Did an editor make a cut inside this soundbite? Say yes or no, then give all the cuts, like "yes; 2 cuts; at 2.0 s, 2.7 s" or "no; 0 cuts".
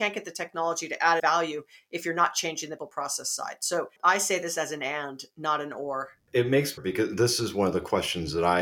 yes; 4 cuts; at 1.2 s, 2.8 s, 4.0 s, 6.8 s